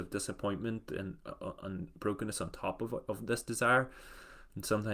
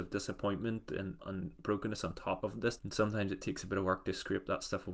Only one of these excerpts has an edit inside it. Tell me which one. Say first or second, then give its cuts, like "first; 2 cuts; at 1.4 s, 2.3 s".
second; 3 cuts; at 1.2 s, 2.4 s, 2.8 s